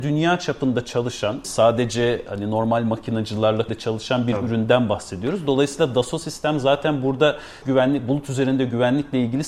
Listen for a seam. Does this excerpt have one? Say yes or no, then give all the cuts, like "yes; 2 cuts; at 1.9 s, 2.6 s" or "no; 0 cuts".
yes; 3 cuts; at 1.4 s, 3.7 s, 7.6 s